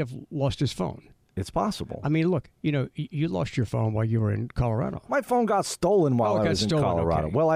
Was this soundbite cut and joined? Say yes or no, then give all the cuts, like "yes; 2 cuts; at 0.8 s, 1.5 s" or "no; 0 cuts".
no; 0 cuts